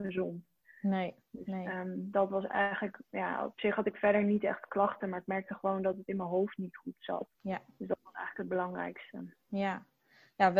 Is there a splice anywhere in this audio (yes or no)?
yes